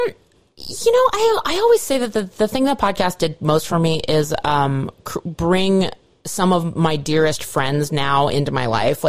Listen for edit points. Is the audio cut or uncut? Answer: uncut